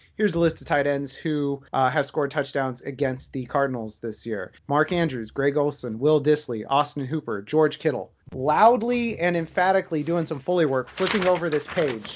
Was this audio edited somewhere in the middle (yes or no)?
yes